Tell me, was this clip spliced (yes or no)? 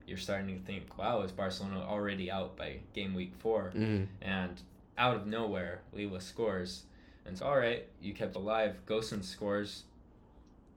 yes